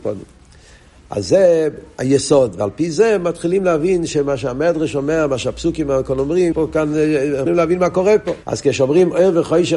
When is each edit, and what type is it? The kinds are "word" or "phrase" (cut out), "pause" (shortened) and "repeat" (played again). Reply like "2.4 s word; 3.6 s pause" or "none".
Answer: 6.5 s word; 7.5 s word; 8.4 s pause